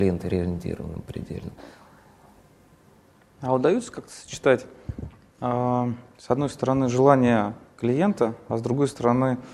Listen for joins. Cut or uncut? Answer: uncut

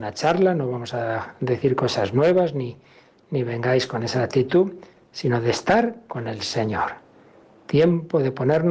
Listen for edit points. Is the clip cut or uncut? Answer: uncut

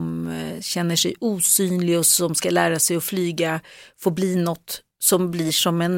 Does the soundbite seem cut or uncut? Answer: uncut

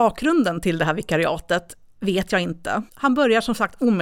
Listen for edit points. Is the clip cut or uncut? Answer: cut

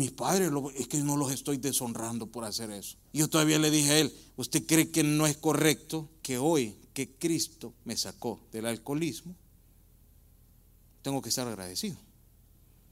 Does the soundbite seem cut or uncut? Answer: cut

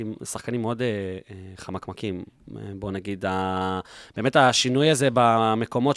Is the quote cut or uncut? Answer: uncut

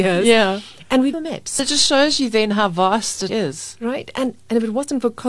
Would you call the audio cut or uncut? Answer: cut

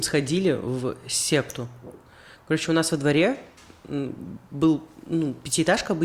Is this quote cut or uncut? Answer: uncut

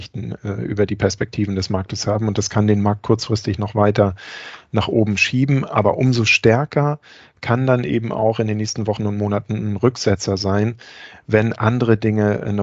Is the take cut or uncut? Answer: uncut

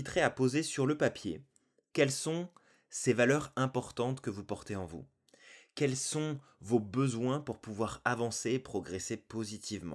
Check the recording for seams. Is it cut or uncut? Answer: uncut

